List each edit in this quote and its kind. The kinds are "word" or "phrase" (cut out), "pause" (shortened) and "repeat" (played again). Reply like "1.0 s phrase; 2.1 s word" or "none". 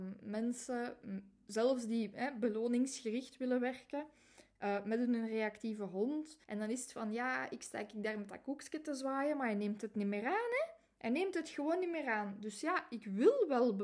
6.4 s pause